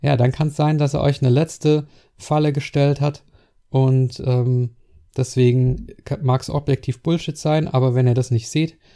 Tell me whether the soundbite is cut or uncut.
uncut